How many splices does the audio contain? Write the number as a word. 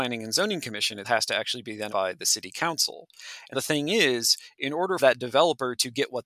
four